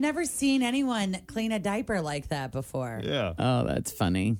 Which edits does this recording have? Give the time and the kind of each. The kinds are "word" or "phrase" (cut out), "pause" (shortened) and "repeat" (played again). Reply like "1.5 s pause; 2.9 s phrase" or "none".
none

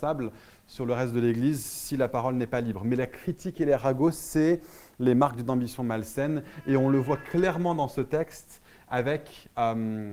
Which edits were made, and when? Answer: none

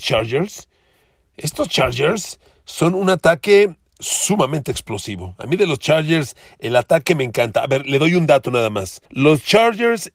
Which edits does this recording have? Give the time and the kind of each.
9.1 s pause

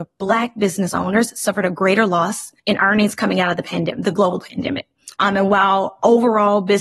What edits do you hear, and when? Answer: 2.6 s pause; 5.1 s pause

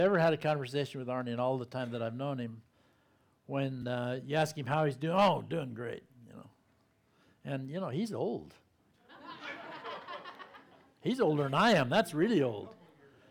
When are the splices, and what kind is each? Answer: none

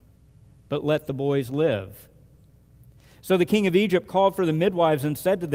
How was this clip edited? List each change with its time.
none

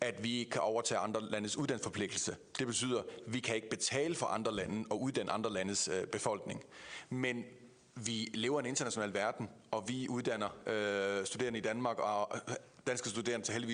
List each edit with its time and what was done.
none

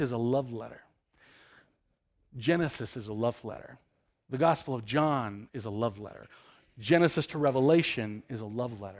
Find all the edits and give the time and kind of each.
none

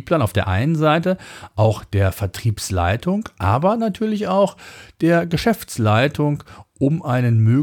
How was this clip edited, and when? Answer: none

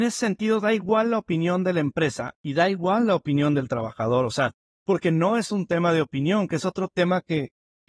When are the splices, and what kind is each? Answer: none

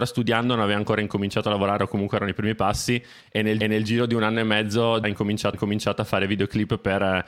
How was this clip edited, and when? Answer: 3.6 s repeat; 5.0 s word; 5.5 s repeat

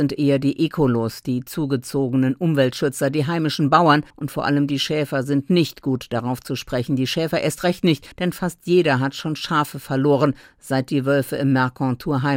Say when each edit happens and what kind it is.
4.1 s pause; 8.1 s pause

